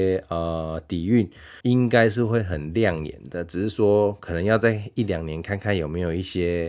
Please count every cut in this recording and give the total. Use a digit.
1